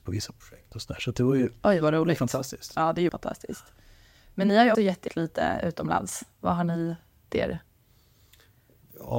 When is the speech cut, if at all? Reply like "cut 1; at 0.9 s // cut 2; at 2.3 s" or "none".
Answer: cut 1; at 3.1 s // cut 2; at 4.7 s // cut 3; at 5.1 s // cut 4; at 7.3 s